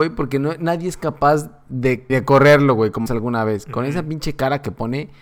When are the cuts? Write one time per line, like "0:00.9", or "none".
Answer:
0:02.1
0:03.1

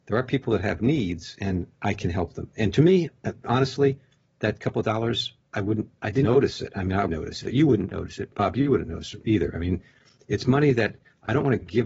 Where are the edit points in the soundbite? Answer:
0:06.2
0:07.1
0:09.2

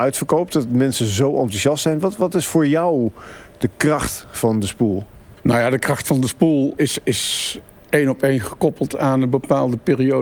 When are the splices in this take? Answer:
0:05.4
0:06.8

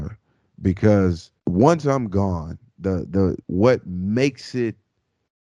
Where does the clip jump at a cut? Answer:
0:01.4
0:03.4

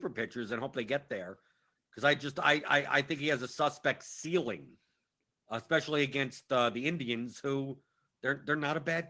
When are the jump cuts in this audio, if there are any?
none

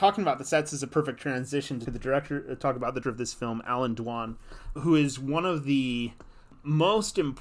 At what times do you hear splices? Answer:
0:01.9
0:03.0
0:04.8

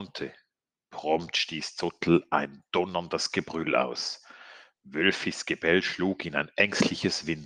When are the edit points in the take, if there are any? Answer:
none

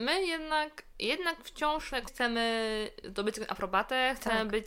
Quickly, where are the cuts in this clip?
0:02.1

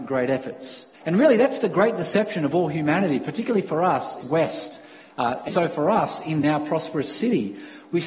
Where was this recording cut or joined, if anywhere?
0:00.9
0:04.2
0:05.5
0:06.4

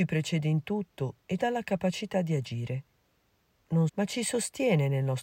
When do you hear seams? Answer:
0:01.4
0:03.9

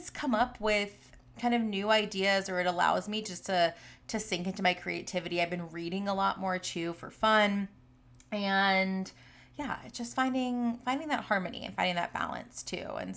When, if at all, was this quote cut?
none

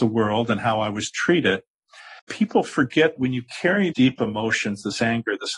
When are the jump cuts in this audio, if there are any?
0:02.2
0:03.2
0:03.9

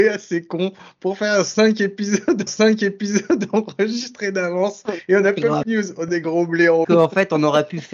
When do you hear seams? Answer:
0:02.5
0:05.6
0:06.1
0:06.8

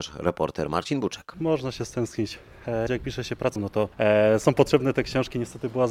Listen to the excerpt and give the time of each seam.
0:02.9
0:03.6
0:03.9

